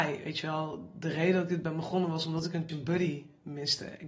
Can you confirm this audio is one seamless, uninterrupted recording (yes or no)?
no